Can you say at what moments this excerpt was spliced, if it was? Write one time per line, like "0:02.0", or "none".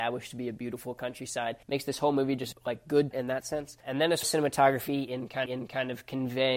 0:01.6
0:02.5
0:03.1
0:03.8
0:04.2
0:05.5